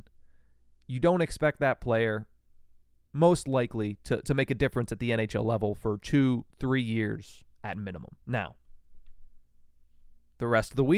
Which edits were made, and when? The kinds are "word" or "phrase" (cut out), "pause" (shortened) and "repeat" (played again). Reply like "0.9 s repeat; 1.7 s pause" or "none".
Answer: 8.2 s pause